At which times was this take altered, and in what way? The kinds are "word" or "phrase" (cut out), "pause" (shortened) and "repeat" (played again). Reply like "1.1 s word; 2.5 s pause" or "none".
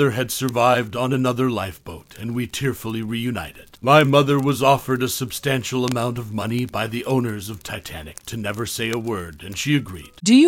3.8 s pause